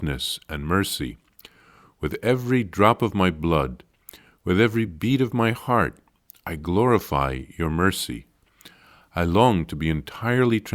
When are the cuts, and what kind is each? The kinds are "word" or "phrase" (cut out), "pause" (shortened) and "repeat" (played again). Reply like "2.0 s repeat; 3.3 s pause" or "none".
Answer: none